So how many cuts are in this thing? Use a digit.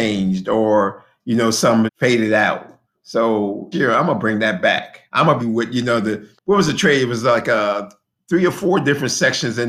5